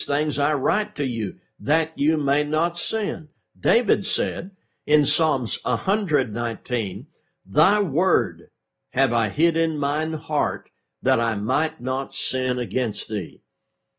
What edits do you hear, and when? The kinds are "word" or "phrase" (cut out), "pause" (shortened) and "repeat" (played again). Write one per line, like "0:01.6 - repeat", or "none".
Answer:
none